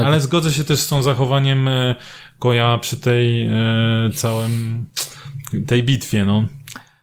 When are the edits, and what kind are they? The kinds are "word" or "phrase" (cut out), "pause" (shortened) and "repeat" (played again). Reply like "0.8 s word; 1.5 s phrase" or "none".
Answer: none